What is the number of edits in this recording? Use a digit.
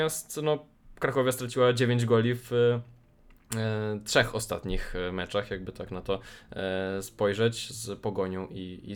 0